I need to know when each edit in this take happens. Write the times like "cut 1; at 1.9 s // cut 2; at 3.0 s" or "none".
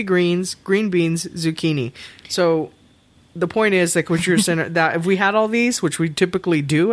none

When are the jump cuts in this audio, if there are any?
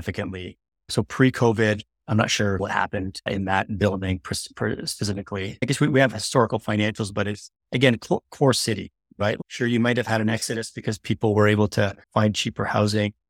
cut 1; at 7.6 s // cut 2; at 12.0 s

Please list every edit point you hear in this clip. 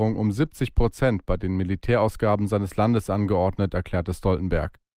none

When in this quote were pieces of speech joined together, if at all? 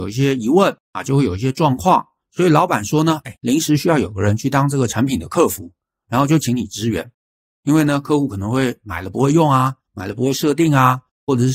none

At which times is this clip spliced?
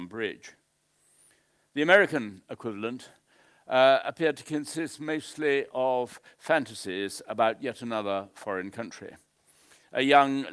none

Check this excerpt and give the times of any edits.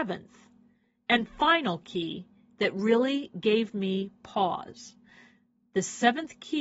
none

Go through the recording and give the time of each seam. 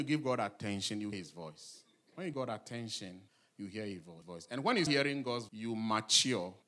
cut 1; at 1.1 s // cut 2; at 2.3 s // cut 3; at 4.2 s // cut 4; at 4.9 s // cut 5; at 5.5 s

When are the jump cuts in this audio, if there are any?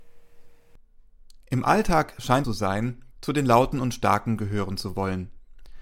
cut 1; at 2.4 s // cut 2; at 3.1 s

